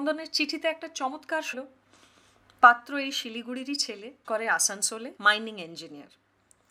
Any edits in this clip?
yes; 3 cuts; at 1.5 s, 4.2 s, 5.2 s

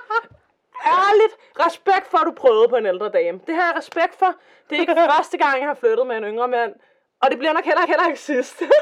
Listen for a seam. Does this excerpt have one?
yes; 1 cut; at 7.8 s

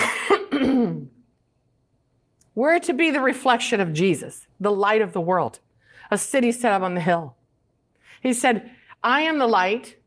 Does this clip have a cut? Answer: no; 0 cuts

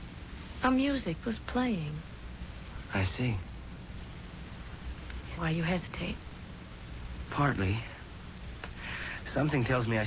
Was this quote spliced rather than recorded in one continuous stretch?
yes; 2 cuts; at 1.2 s, 5.4 s

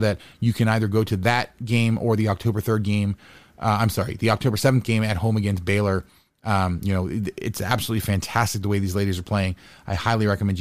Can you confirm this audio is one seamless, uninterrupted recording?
yes; 0 cuts

